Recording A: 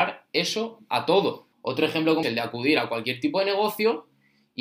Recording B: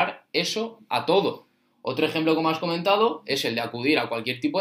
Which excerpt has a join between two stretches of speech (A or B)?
A